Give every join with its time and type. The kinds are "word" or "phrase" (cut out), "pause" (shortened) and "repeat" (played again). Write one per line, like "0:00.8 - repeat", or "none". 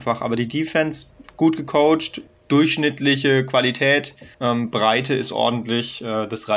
0:02.3 - pause
0:04.3 - pause